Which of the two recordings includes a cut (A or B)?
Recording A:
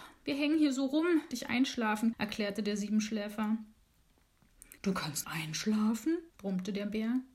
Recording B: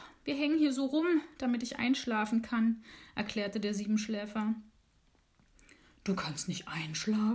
A